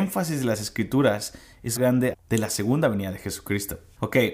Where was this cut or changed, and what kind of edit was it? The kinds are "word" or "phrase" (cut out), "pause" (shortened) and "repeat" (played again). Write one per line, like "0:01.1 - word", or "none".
0:01.8 - phrase
0:02.1 - word